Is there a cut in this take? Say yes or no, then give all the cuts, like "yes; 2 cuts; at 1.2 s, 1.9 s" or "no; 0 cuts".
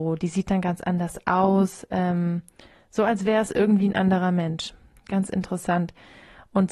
no; 0 cuts